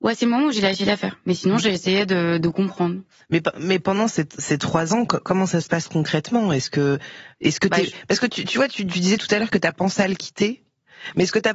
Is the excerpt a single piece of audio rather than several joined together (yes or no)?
yes